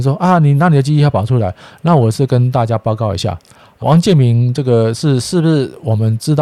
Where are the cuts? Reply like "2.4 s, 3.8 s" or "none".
3.8 s